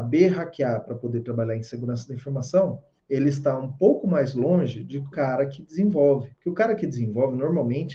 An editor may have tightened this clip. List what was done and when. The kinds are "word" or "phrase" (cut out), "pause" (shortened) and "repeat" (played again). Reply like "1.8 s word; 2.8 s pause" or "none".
3.0 s pause; 5.1 s word; 6.3 s pause